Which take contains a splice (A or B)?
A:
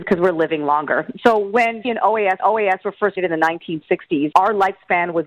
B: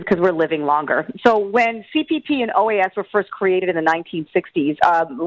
A